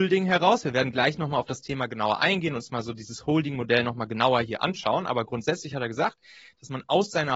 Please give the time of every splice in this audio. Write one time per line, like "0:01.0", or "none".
none